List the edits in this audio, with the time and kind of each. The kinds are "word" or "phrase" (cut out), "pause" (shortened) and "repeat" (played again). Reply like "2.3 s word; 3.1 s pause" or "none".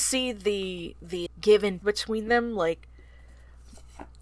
1.3 s word; 1.8 s word